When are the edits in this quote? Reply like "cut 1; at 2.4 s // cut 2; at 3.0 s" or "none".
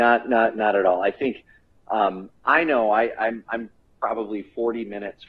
none